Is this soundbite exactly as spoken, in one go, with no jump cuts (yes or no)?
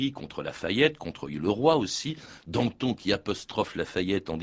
yes